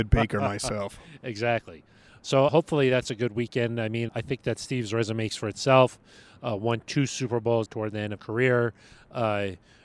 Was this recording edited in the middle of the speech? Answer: yes; 5 cuts; at 2.5 s, 4.1 s, 5.3 s, 7.7 s, 8.2 s

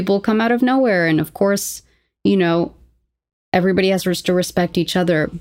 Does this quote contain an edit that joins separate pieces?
no; 0 cuts

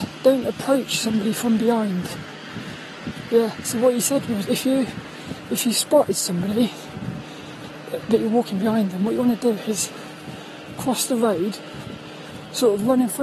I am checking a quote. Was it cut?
yes; 1 cut; at 4.4 s

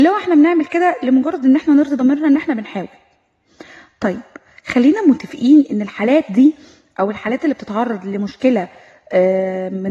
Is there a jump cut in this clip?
no; 0 cuts

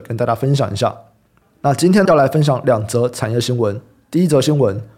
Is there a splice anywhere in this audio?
yes; 1 cut; at 2.0 s

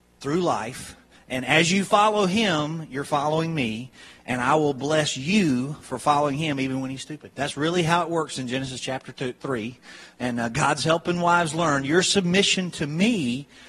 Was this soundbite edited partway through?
no; 0 cuts

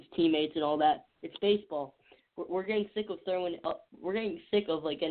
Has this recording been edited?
no; 0 cuts

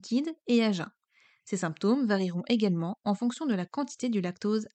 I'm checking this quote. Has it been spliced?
no; 0 cuts

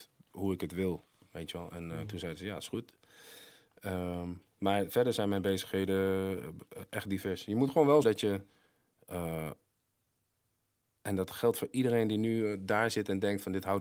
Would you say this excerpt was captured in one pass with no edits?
no; 1 cut; at 8.0 s

